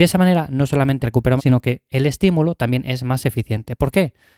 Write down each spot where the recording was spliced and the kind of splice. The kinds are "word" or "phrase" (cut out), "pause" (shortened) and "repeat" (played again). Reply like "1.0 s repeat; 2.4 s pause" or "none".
1.0 s word; 1.4 s word

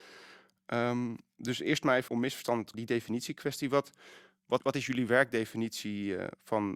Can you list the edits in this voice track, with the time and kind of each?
2.1 s word; 2.7 s word; 4.6 s word

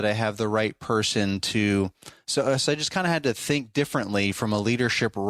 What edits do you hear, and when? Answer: none

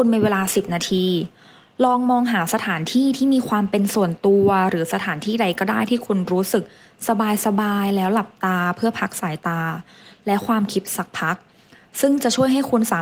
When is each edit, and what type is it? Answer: none

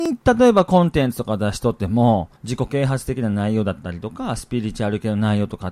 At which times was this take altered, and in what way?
2.4 s pause

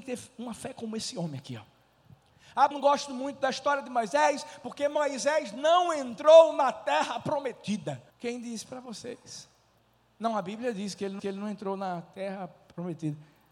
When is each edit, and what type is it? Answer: 2.7 s phrase; 8.1 s pause; 9.8 s pause; 11.2 s repeat

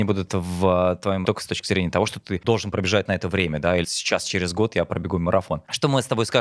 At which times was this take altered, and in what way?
1.2 s phrase; 2.4 s word; 3.8 s word

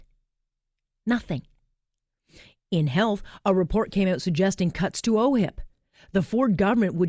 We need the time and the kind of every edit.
none

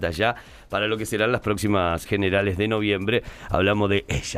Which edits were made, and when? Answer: 2.1 s word

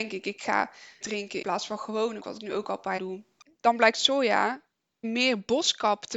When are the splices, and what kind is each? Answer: 1.0 s word; 1.4 s word; 2.2 s word; 3.0 s word; 5.0 s word

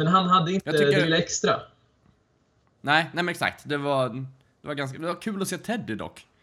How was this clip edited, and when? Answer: none

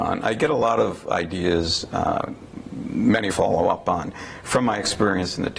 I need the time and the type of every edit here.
3.3 s phrase

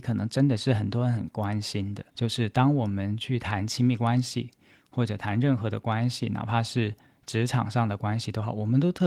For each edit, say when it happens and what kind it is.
2.1 s pause

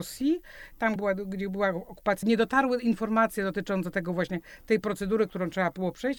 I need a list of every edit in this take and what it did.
1.0 s word; 2.2 s word

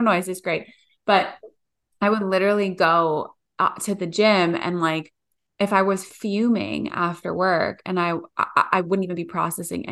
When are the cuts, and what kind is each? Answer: none

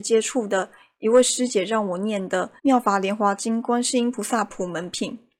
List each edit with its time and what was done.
2.6 s pause

